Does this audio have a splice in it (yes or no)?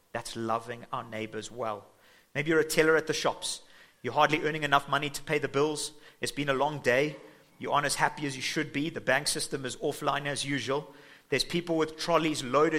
no